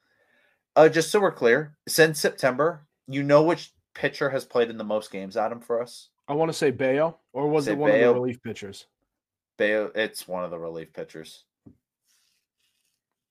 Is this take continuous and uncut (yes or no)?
no